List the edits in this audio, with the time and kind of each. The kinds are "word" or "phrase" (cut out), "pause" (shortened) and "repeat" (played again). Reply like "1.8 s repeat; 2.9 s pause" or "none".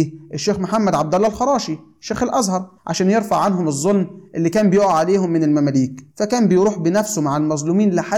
2.8 s pause; 6.1 s pause